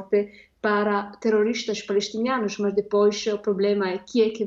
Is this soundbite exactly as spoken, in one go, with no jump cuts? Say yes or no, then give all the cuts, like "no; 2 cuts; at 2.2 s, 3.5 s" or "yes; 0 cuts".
yes; 0 cuts